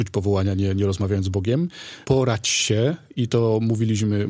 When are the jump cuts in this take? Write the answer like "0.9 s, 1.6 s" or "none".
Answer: 2.0 s